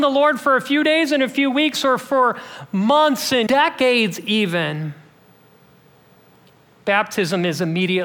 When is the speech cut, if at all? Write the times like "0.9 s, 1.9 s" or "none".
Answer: 3.5 s